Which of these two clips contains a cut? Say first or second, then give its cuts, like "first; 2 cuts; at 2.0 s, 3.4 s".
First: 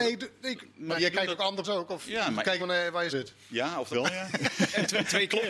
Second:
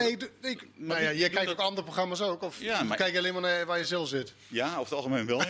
first; 5 cuts; at 1.0 s, 1.6 s, 2.6 s, 3.1 s, 3.9 s